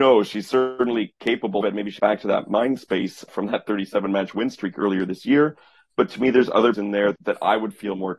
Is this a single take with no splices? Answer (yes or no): no